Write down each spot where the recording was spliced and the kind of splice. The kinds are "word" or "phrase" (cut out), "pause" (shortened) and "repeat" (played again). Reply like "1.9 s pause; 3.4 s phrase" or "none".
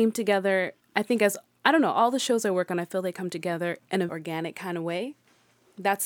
4.1 s word